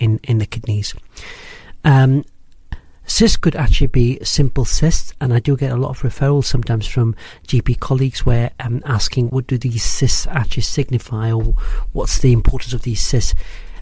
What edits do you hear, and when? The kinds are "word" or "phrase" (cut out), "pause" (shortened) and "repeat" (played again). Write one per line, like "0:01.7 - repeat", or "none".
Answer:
0:09.3 - word

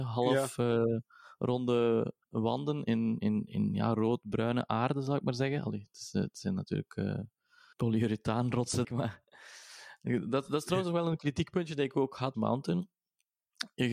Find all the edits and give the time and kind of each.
0:02.2 - pause
0:07.7 - word
0:08.8 - phrase
0:12.3 - phrase

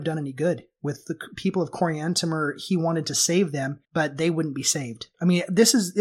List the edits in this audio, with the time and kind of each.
0:03.8 - pause

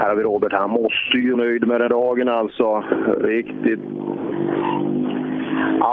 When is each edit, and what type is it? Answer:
0:01.3 - word
0:01.9 - word

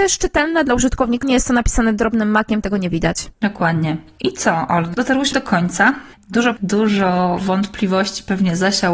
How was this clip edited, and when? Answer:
0:01.2 - phrase
0:02.6 - phrase
0:03.3 - pause
0:05.3 - word
0:06.6 - word

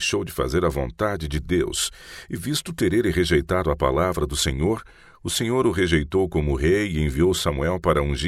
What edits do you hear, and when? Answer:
none

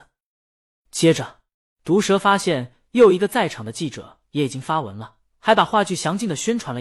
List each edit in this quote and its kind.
0:01.5 - pause

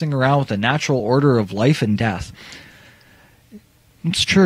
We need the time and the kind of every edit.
none

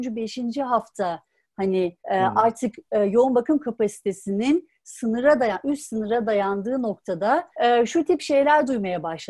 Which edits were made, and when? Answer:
0:02.0 - pause
0:07.5 - pause

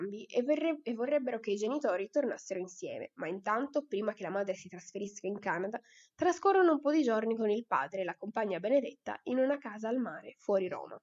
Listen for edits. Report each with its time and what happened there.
none

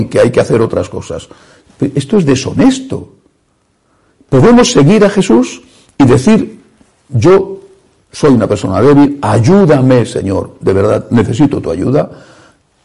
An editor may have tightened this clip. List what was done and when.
none

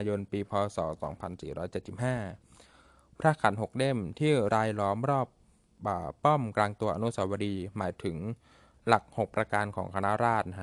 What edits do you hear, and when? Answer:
none

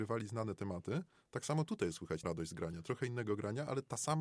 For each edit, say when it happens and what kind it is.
0:02.2 - word

